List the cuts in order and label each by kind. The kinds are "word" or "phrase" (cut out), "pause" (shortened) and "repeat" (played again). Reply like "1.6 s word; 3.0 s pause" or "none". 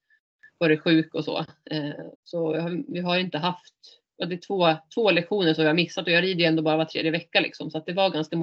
2.1 s pause